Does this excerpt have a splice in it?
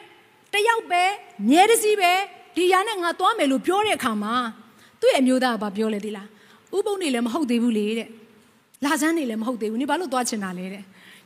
no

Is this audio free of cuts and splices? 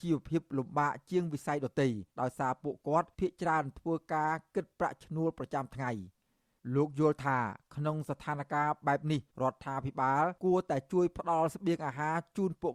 no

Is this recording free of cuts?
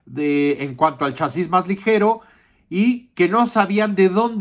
yes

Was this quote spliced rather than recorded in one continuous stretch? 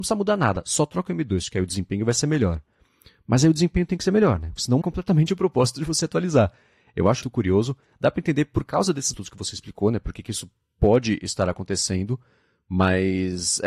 yes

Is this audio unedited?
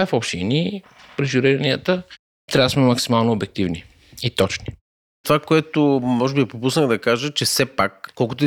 yes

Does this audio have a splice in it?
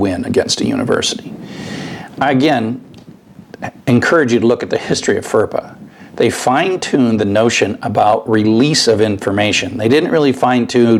no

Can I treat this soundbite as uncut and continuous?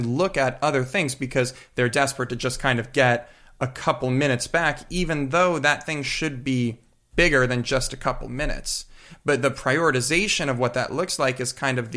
yes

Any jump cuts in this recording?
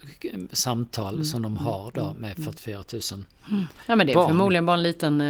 no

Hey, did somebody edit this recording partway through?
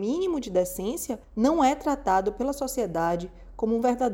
yes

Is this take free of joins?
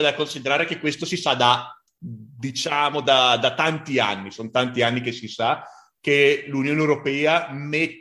yes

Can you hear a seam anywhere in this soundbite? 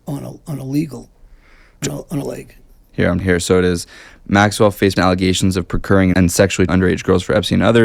yes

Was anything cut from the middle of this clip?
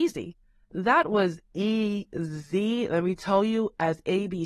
no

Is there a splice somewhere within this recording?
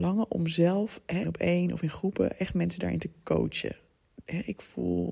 yes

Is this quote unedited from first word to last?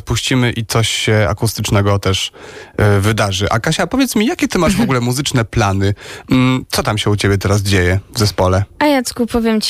yes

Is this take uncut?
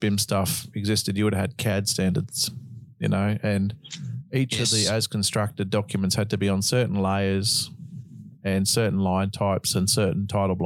yes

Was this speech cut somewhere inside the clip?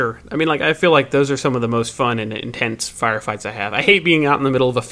no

